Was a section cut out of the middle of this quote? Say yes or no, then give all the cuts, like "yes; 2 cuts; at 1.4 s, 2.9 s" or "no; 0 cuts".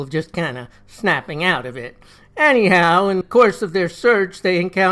yes; 1 cut; at 3.2 s